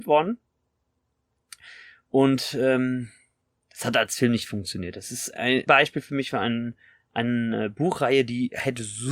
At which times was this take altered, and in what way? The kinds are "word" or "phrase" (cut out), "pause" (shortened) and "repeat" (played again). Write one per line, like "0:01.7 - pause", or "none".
0:05.7 - word

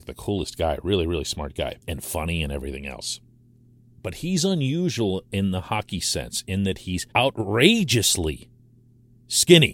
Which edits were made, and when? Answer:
0:01.8 - pause
0:07.1 - pause

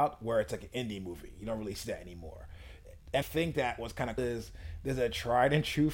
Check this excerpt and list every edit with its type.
0:03.2 - word
0:04.2 - phrase

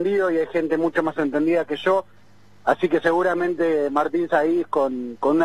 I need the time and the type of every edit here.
none

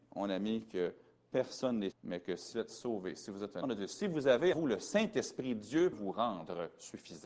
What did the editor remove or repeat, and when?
0:01.9 - word
0:02.5 - word
0:03.6 - word
0:04.5 - word
0:05.9 - word

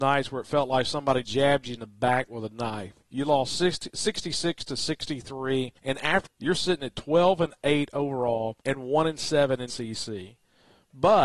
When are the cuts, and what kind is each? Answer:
0:01.2 - word
0:05.8 - pause
0:06.2 - phrase
0:08.6 - pause
0:09.7 - word

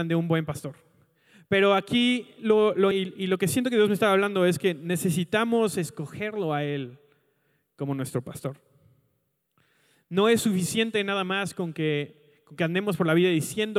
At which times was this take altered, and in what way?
0:02.9 - word

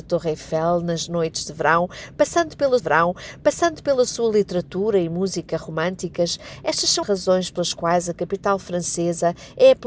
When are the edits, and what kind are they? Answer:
0:02.8 - repeat
0:07.0 - phrase

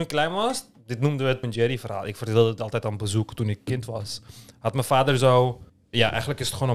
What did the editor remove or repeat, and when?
0:01.4 - word
0:05.7 - pause

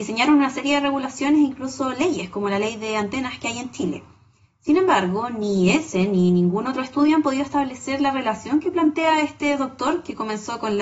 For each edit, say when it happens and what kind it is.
none

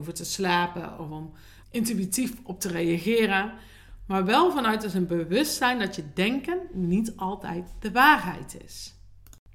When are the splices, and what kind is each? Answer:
0:01.6 - word

